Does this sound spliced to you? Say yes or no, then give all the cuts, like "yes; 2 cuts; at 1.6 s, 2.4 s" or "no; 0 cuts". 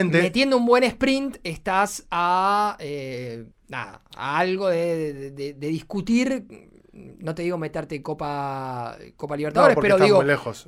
yes; 1 cut; at 3.5 s